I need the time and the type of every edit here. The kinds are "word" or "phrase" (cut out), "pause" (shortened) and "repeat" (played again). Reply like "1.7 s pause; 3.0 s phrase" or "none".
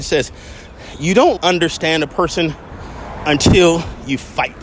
1.4 s word